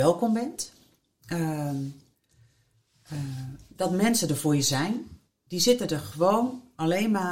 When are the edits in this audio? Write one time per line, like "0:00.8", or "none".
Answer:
none